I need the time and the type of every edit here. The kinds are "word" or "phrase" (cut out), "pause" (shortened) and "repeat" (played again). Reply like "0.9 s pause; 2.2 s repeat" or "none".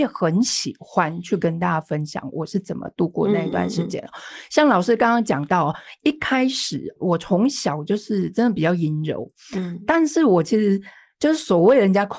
none